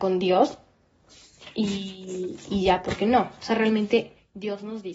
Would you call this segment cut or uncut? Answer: uncut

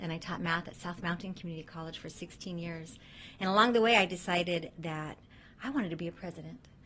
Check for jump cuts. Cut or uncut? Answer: uncut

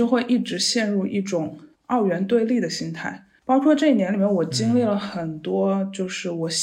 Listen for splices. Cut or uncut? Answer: cut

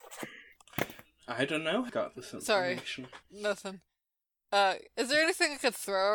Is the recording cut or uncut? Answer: cut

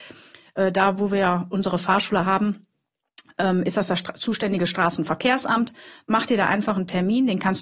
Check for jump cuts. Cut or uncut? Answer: uncut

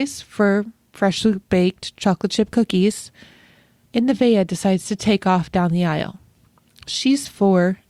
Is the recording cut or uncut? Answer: uncut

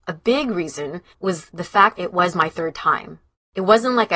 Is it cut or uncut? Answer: cut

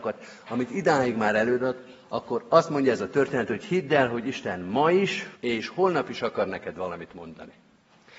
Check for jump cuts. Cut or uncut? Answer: cut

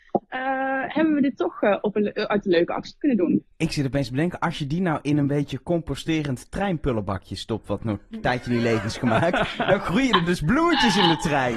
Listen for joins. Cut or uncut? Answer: uncut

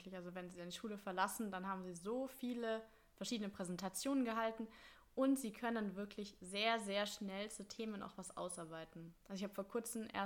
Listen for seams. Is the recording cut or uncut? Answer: uncut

